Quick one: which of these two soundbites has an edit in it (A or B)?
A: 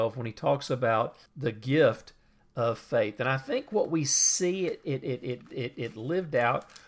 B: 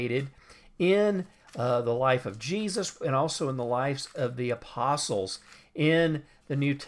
A